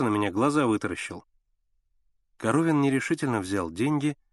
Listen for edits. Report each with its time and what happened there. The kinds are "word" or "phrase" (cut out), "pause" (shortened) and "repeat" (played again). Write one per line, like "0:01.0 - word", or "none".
none